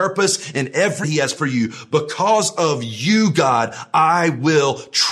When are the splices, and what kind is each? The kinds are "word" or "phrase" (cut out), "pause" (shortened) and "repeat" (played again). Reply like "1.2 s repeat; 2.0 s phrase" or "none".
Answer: 1.0 s phrase; 1.4 s word